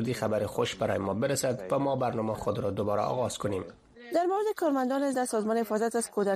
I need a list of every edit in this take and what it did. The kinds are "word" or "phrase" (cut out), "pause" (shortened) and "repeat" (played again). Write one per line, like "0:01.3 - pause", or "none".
0:02.3 - word
0:05.1 - word